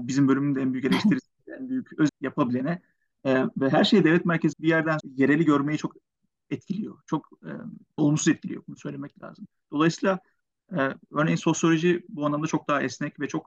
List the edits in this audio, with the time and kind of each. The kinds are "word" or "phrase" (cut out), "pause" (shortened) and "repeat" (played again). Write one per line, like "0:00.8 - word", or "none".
0:02.1 - word
0:04.5 - word
0:05.0 - word
0:08.0 - word

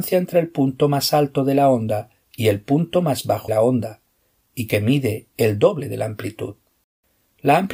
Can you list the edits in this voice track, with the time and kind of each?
0:03.5 - word

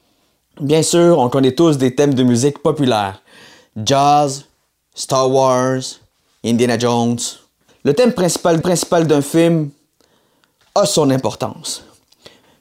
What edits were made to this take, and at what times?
0:08.6 - repeat

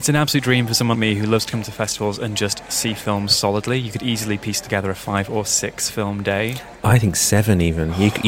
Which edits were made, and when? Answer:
0:00.9 - word
0:06.8 - pause

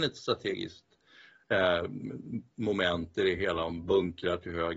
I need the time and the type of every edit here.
none

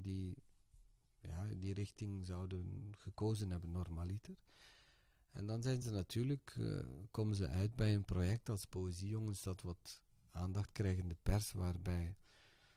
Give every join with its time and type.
none

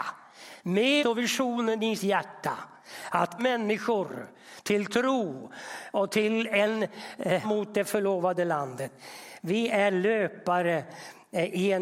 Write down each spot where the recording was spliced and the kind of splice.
0:01.0 - word
0:02.0 - word
0:03.4 - word
0:07.4 - word

